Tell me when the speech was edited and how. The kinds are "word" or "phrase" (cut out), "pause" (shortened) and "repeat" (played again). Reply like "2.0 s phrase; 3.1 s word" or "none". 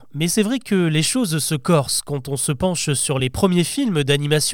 none